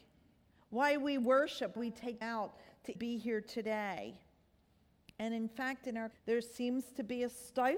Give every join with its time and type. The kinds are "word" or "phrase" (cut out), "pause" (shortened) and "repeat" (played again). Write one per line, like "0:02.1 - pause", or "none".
0:01.8 - word
0:02.2 - word
0:03.0 - word
0:06.1 - word